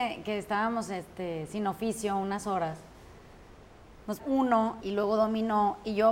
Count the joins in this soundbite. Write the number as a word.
two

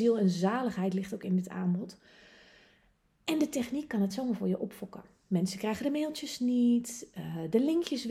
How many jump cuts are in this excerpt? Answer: zero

